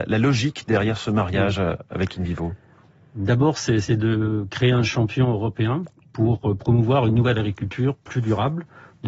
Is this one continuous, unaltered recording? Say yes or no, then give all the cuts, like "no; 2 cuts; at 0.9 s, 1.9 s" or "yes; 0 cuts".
yes; 0 cuts